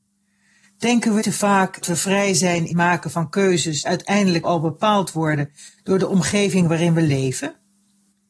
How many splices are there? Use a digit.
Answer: 5